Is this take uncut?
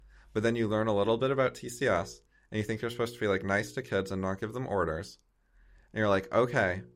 yes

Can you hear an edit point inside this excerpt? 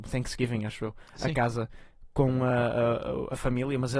no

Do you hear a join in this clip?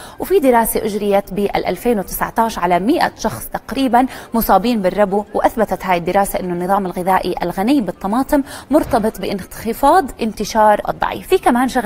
yes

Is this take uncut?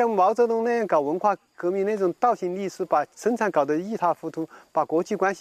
no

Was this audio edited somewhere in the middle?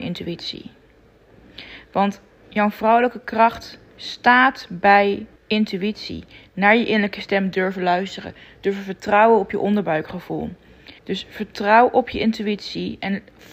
yes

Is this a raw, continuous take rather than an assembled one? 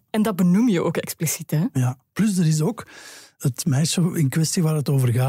yes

